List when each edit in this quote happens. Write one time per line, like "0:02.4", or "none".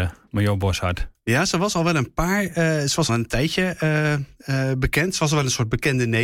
0:03.1

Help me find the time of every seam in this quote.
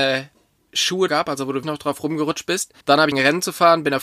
0:01.1
0:01.6
0:02.8
0:03.1

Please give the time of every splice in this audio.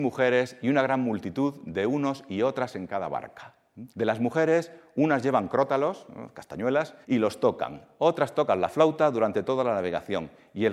0:03.9
0:07.0

